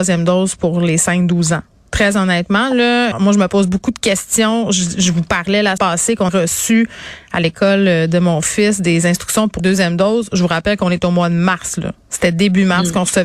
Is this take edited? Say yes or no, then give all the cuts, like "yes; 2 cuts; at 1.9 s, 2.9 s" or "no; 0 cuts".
yes; 4 cuts; at 3.1 s, 5.8 s, 6.3 s, 9.6 s